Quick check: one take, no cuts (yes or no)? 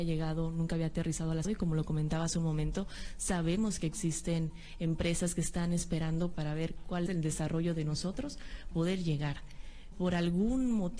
no